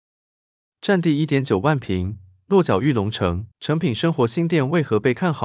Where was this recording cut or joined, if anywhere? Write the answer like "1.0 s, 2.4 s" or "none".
3.5 s